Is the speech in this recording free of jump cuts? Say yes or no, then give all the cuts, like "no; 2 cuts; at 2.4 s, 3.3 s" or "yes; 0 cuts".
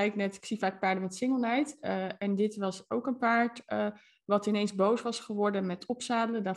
yes; 0 cuts